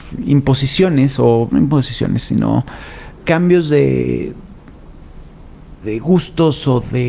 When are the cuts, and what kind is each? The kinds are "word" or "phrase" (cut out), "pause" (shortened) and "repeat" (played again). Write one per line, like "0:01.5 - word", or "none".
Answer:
0:01.5 - word
0:03.2 - word
0:05.8 - word